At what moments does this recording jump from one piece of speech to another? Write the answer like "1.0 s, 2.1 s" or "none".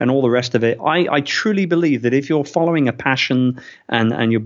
none